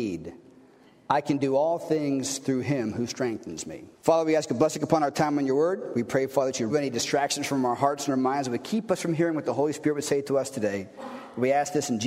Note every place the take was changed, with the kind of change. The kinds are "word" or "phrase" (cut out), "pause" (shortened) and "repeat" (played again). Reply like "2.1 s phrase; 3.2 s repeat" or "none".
3.9 s pause; 6.7 s word